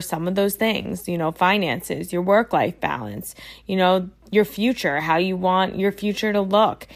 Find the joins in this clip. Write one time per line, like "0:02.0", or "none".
none